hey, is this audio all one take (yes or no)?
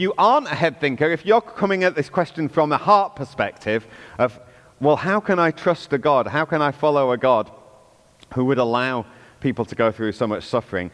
yes